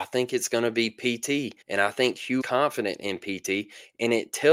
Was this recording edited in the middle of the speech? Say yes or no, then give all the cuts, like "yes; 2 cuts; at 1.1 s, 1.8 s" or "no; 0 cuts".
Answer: yes; 2 cuts; at 1.6 s, 2.4 s